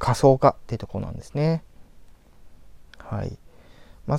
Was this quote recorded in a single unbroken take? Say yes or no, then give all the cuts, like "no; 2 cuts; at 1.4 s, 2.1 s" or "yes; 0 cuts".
no; 1 cut; at 2.9 s